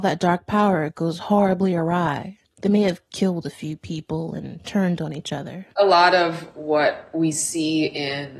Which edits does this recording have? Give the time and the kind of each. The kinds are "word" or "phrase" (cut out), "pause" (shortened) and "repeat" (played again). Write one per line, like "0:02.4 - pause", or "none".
0:03.1 - pause
0:05.7 - pause